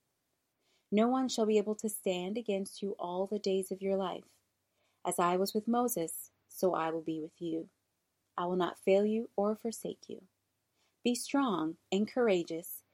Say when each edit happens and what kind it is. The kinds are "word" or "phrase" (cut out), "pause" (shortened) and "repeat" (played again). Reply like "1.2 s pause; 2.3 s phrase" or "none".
none